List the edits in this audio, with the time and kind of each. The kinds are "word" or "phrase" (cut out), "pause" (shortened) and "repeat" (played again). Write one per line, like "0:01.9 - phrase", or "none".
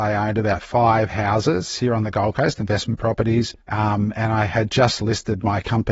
0:03.6 - pause